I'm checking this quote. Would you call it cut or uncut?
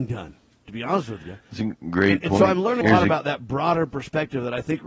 cut